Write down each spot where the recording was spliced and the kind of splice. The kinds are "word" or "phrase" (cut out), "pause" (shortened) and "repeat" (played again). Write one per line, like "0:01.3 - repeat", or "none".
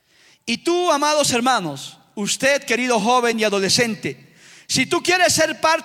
none